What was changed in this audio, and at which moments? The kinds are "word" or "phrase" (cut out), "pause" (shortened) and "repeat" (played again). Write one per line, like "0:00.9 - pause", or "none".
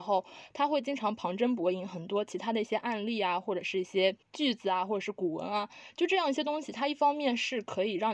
0:04.2 - pause